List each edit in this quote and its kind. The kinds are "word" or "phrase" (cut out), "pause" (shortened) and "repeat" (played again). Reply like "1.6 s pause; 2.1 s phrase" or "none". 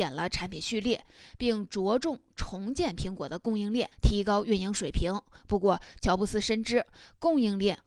3.9 s pause